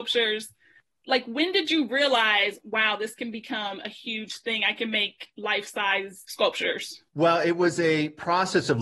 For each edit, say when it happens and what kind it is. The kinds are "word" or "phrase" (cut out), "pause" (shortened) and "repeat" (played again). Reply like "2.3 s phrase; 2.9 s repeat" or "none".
7.1 s pause